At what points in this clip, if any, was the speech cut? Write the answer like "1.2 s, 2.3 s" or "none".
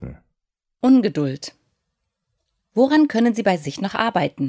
none